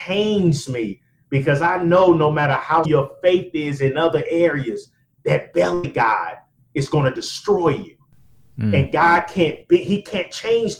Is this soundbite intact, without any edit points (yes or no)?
no